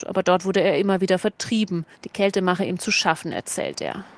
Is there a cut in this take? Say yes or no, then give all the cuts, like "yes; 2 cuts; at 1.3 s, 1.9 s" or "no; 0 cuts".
yes; 1 cut; at 1.9 s